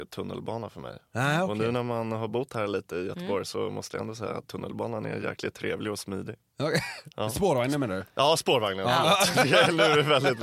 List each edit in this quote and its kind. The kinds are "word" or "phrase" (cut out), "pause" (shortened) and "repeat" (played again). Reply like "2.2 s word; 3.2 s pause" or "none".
none

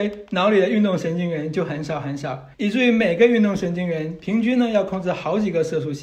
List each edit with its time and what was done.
2.5 s pause

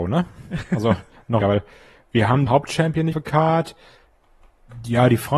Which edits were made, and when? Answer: 1.4 s word; 2.5 s word; 3.1 s word

